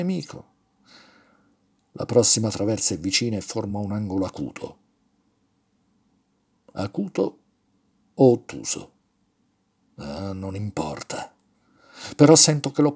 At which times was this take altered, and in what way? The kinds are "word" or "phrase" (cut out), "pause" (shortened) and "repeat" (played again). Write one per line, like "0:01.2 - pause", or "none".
none